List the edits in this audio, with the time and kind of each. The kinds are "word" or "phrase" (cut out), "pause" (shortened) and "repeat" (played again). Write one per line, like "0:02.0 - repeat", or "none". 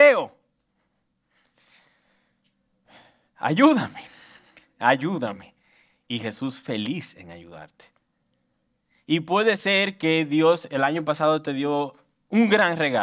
none